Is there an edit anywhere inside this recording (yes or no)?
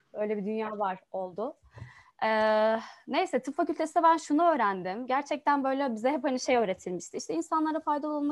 no